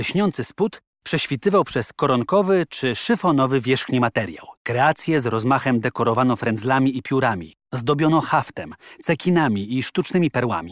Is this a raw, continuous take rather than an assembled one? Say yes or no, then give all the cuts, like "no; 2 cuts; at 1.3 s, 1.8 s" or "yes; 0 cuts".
no; 2 cuts; at 4.6 s, 7.7 s